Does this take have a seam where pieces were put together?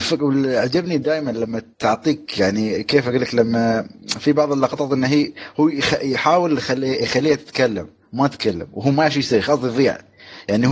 yes; 1 cut; at 1.7 s

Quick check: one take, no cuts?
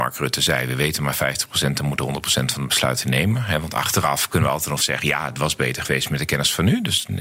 yes; 0 cuts

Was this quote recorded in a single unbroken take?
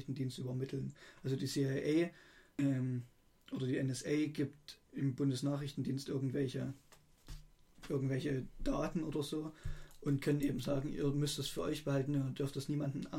yes; 0 cuts

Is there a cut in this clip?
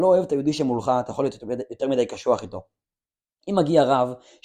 no; 0 cuts

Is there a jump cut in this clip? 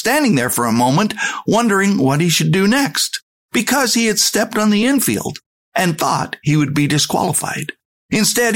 no; 0 cuts

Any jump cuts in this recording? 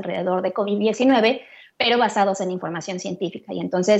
no; 0 cuts

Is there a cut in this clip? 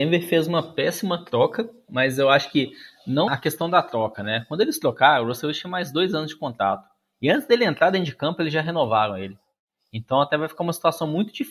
yes; 1 cut; at 3.3 s

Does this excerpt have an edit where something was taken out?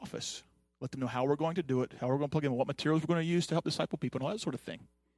no; 0 cuts

